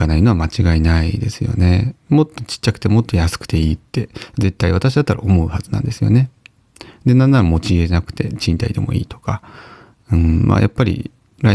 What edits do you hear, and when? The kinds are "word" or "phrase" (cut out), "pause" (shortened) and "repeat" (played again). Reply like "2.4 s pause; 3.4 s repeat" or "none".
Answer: none